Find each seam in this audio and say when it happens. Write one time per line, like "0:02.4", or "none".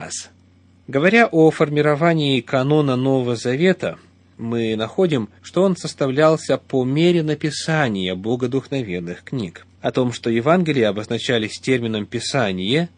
0:05.4
0:09.7